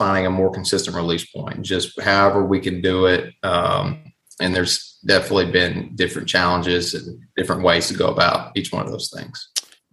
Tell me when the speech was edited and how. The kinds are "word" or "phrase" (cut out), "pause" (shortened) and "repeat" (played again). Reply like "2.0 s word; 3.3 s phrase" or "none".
none